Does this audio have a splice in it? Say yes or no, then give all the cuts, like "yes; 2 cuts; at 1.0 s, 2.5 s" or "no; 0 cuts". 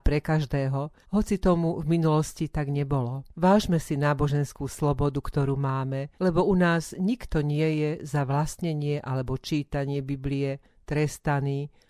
yes; 3 cuts; at 1.0 s, 3.3 s, 6.2 s